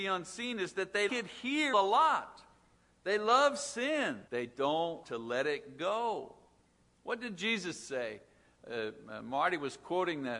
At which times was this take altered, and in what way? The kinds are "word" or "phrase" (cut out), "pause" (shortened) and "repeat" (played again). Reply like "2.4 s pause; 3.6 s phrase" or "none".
1.1 s word; 1.7 s phrase; 4.3 s pause; 5.0 s word; 6.7 s pause